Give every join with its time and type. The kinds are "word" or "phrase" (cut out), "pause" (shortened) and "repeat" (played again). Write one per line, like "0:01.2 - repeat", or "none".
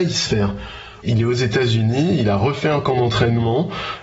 none

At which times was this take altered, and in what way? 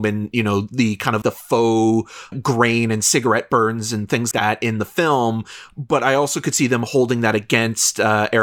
0:01.2 - word
0:02.3 - word
0:04.3 - word

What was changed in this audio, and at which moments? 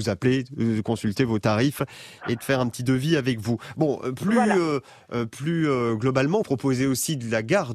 0:06.4 - word

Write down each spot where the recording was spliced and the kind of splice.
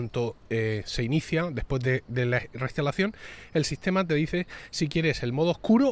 none

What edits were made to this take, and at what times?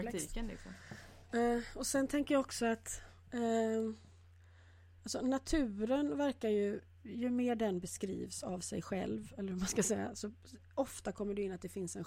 none

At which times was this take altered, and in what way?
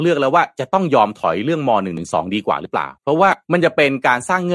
0:03.0 - pause
0:03.4 - pause

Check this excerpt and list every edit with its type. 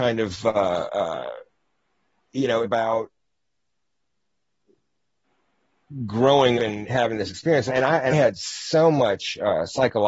0:02.6 - phrase
0:06.6 - word
0:06.9 - word
0:07.7 - word
0:08.1 - word

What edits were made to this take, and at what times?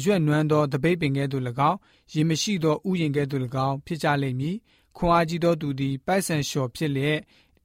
none

